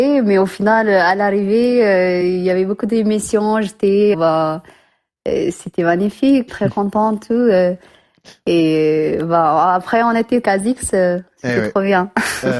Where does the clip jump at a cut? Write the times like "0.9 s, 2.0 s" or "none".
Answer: 4.1 s, 6.5 s, 10.4 s